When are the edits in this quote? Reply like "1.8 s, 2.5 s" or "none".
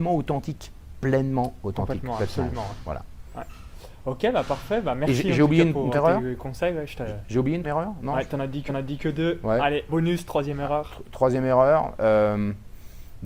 5.9 s, 7.6 s, 8.7 s, 9.9 s